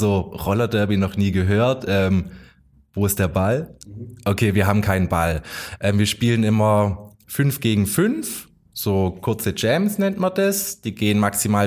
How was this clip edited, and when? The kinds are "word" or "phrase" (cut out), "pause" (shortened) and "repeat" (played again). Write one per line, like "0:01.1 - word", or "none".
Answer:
none